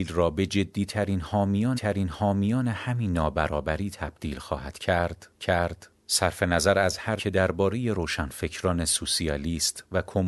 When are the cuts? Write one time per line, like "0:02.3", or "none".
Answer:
0:01.7
0:05.4
0:07.2